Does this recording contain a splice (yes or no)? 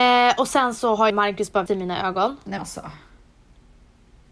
yes